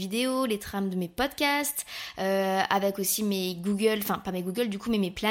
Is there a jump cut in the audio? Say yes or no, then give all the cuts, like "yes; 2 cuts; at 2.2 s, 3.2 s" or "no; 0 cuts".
no; 0 cuts